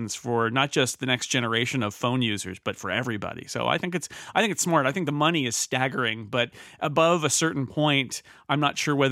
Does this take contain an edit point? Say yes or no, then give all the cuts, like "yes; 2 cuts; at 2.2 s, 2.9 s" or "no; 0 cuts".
no; 0 cuts